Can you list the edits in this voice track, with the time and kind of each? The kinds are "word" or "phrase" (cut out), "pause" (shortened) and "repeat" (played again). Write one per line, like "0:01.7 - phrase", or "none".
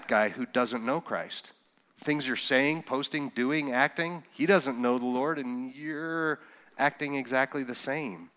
none